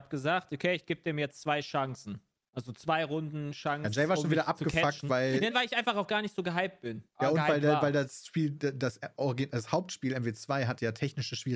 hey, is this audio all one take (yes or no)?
no